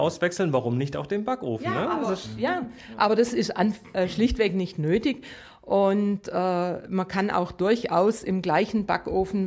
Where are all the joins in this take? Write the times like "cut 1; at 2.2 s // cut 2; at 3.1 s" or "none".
none

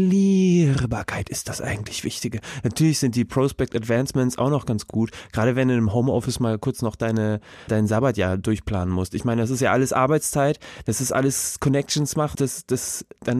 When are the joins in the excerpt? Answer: cut 1; at 7.7 s // cut 2; at 12.3 s

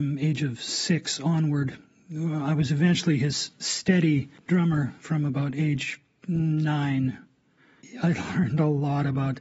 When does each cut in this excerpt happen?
none

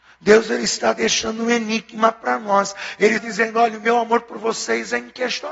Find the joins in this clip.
cut 1; at 3.2 s

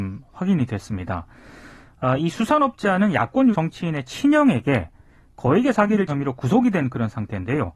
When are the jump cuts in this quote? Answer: cut 1; at 3.5 s // cut 2; at 6.1 s

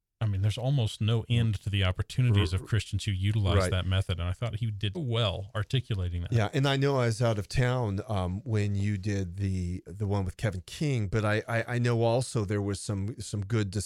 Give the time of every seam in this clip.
cut 1; at 4.9 s // cut 2; at 9.9 s

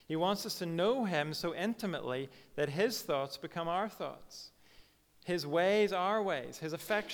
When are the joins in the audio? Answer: none

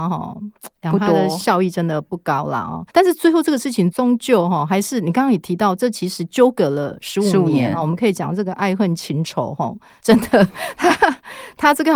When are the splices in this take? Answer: cut 1; at 2.9 s

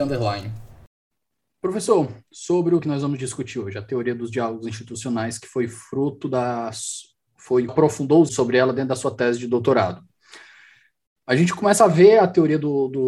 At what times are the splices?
cut 1; at 2.8 s // cut 2; at 7.7 s // cut 3; at 8.3 s

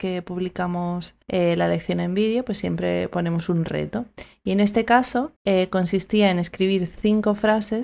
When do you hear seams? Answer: cut 1; at 1.2 s // cut 2; at 5.4 s

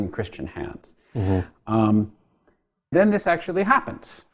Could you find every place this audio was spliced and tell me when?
cut 1; at 2.9 s

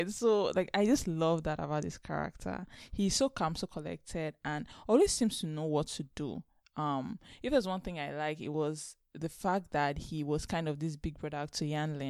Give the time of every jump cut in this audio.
none

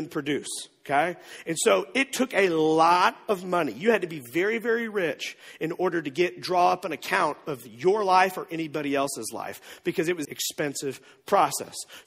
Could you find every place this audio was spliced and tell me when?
cut 1; at 10.2 s

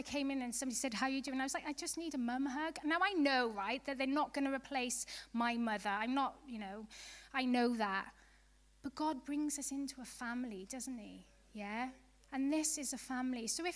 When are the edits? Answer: none

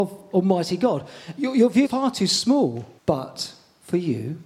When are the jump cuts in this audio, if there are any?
cut 1; at 1.8 s // cut 2; at 3.0 s

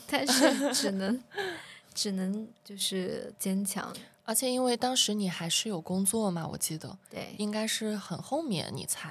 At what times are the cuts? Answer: none

